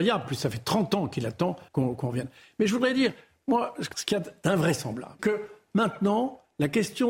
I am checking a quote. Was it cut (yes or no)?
yes